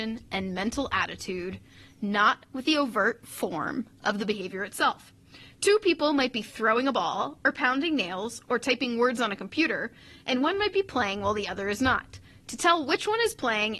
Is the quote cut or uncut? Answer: uncut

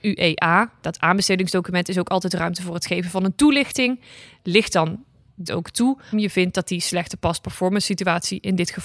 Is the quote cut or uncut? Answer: cut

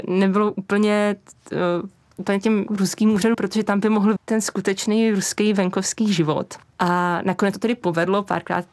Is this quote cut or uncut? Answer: cut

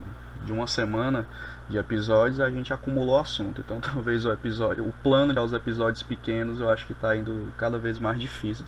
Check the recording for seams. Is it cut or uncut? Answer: cut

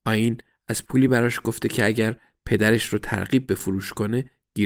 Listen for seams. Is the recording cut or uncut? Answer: uncut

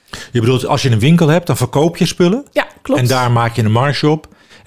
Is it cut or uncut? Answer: uncut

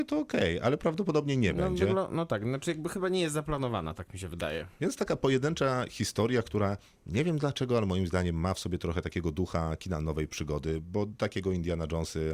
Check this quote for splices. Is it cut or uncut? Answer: uncut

